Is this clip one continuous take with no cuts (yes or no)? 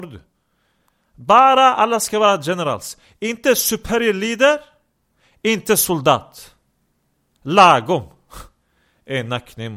yes